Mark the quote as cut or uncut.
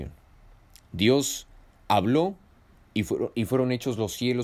uncut